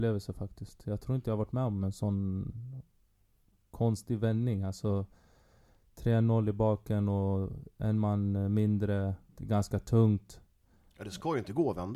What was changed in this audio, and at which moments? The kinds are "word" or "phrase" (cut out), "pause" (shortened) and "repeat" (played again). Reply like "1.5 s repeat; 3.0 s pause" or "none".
9.3 s word

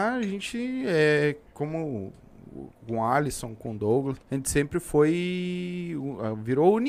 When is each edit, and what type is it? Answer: 1.5 s pause; 4.2 s pause

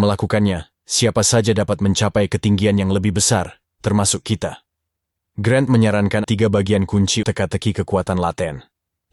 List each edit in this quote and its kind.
6.2 s word; 7.2 s word

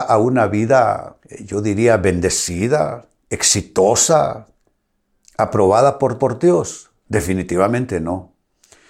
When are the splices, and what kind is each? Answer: 1.2 s pause; 3.2 s pause; 6.2 s repeat

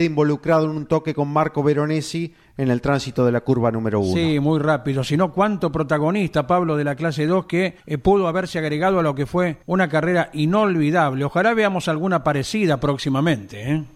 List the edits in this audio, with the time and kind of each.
7.8 s pause; 9.6 s pause

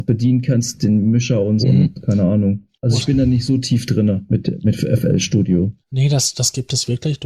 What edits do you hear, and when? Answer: 1.6 s word; 2.7 s pause; 5.8 s pause

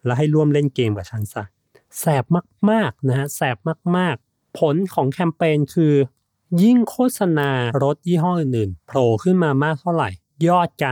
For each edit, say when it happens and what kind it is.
4.2 s pause

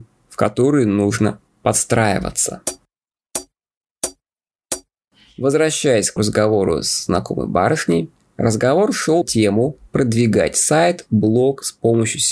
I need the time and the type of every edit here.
6.2 s word; 9.2 s word; 9.9 s word

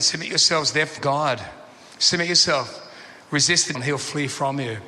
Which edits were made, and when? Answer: 1.0 s word; 3.7 s word

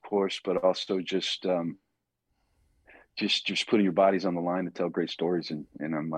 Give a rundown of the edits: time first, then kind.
none

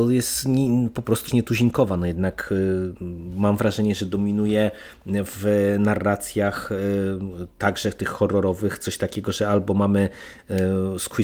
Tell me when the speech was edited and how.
1.3 s word

